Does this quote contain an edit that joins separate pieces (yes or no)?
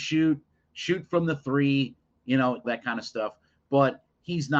yes